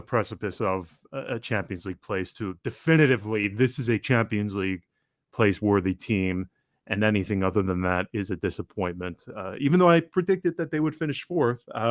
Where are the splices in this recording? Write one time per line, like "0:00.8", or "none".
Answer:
none